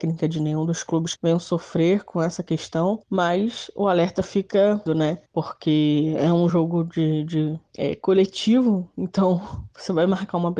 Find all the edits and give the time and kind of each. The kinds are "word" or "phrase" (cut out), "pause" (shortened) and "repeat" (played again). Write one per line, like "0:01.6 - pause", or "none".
0:01.2 - word
0:03.0 - pause
0:04.9 - word
0:05.3 - pause
0:06.5 - phrase
0:07.7 - pause